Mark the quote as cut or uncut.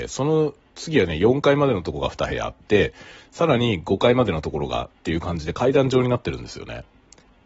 uncut